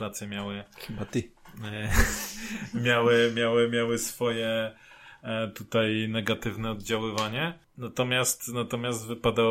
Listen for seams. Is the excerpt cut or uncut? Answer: uncut